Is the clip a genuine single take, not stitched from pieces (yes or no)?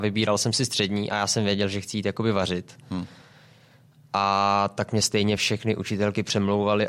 yes